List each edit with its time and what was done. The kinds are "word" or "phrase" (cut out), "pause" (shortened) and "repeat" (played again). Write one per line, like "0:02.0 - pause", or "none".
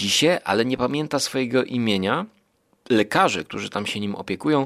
none

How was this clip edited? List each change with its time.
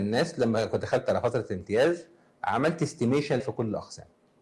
0:03.4 - word

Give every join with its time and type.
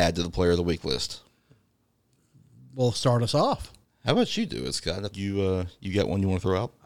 0:03.8 - pause
0:05.1 - word

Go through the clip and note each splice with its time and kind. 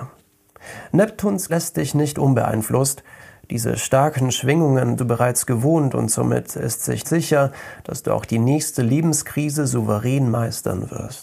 0:01.5 - word
0:05.0 - word
0:07.0 - phrase

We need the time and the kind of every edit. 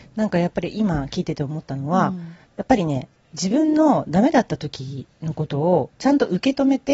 0:02.4 - pause

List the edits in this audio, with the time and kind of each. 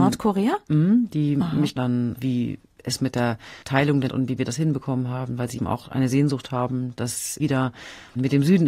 0:01.8 - phrase
0:03.6 - pause
0:04.1 - phrase
0:05.6 - word
0:07.4 - word

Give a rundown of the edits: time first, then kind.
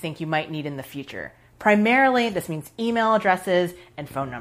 none

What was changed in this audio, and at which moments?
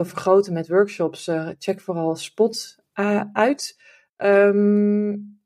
none

